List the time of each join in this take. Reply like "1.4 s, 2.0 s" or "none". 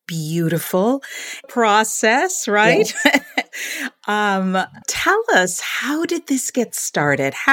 1.4 s, 4.8 s